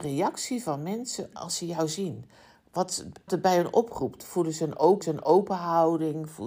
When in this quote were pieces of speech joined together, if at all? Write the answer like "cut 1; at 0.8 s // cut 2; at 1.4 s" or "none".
cut 1; at 1.3 s // cut 2; at 3.3 s // cut 3; at 5.0 s